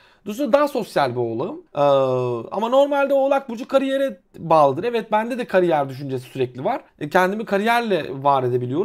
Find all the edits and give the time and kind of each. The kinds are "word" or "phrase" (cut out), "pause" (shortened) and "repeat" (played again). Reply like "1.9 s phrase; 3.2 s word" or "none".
1.7 s pause; 6.9 s pause